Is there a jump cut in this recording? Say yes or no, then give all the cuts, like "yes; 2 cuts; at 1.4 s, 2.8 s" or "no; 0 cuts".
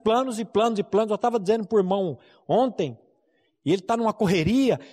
no; 0 cuts